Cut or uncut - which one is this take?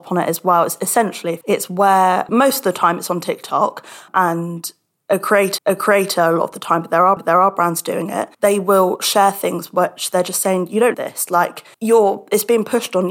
cut